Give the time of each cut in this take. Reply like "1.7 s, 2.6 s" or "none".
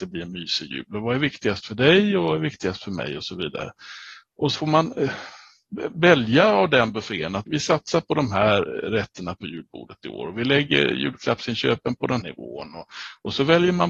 4.5 s, 7.5 s, 12.2 s